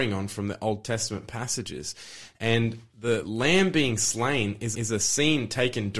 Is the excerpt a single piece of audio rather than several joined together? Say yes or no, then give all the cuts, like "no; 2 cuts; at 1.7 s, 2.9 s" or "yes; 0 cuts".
no; 1 cut; at 4.7 s